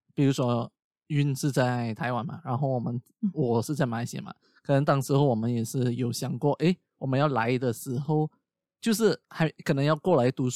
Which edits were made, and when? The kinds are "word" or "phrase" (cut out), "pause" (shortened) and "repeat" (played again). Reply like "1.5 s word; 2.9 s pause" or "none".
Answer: none